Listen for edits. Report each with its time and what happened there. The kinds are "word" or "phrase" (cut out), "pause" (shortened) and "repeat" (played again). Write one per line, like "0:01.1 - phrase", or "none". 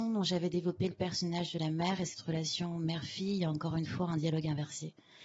none